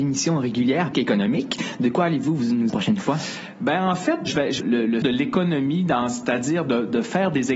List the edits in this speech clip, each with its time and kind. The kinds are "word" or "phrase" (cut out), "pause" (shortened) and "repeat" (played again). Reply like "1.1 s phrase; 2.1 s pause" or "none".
0.9 s phrase; 2.7 s phrase; 4.3 s word; 4.6 s phrase; 5.0 s phrase